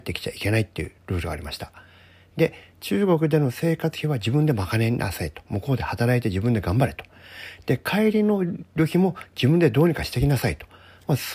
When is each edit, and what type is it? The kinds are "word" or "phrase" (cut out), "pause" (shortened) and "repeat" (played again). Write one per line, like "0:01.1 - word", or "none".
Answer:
0:01.0 - pause